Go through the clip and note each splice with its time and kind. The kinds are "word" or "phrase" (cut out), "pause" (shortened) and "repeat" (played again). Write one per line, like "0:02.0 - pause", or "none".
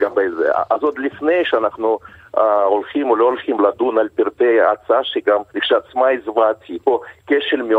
0:05.5 - pause
0:06.8 - word